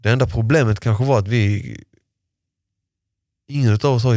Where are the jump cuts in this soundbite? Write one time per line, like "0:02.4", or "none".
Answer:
none

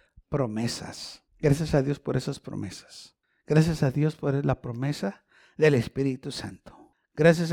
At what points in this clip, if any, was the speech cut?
0:01.3

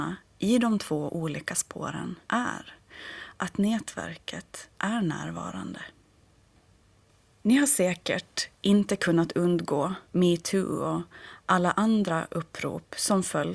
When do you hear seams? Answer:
0:02.2
0:04.7
0:10.0

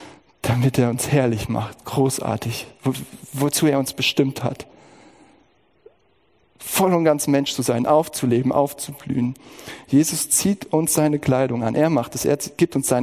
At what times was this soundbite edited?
none

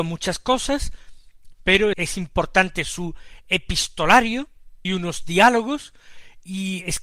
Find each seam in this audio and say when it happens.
0:01.9
0:04.8

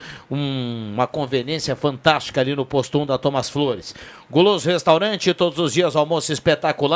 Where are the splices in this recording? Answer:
none

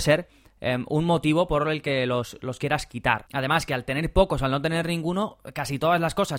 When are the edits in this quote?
none

